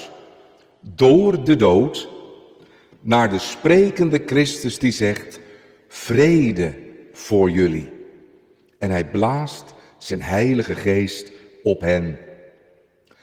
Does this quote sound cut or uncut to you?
uncut